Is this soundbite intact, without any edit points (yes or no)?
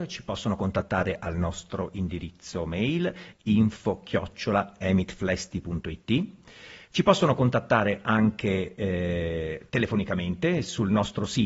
yes